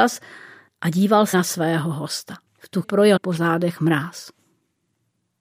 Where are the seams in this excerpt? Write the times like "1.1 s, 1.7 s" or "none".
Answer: 1.3 s, 2.5 s, 2.8 s, 3.2 s

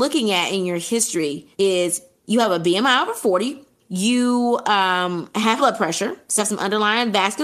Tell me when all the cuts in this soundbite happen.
1.5 s, 3.8 s, 5.6 s, 6.4 s

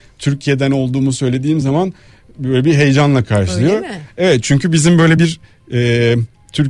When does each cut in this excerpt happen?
none

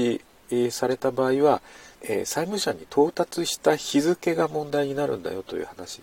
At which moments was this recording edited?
1.9 s

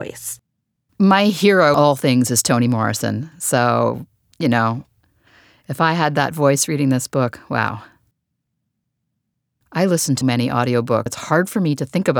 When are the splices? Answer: 1.7 s, 10.2 s, 11.1 s

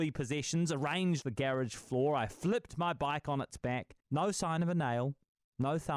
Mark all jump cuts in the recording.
1.2 s, 4.0 s

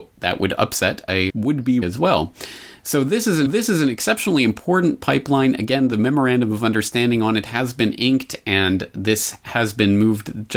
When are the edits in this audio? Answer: 1.3 s, 1.8 s, 3.5 s

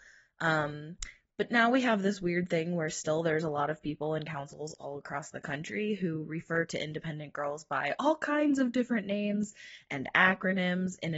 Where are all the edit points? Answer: none

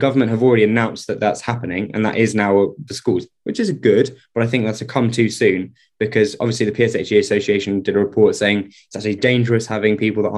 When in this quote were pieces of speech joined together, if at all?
2.9 s, 9.2 s

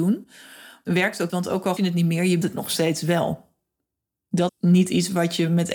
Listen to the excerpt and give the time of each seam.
1.3 s, 1.8 s, 2.4 s, 4.5 s

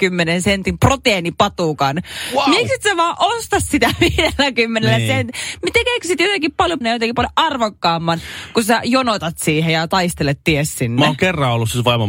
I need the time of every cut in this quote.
6.8 s

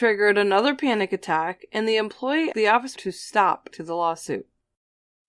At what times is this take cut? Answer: 2.5 s, 2.9 s, 3.7 s

